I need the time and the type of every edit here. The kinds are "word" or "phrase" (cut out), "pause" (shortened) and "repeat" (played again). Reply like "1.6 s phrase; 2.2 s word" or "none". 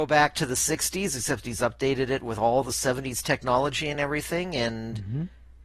none